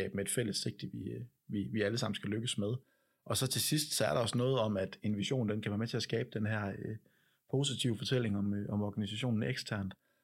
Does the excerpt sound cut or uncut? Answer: uncut